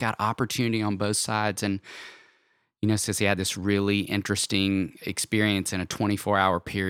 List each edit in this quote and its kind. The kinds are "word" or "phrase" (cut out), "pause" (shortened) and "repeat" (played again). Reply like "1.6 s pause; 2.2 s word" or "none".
none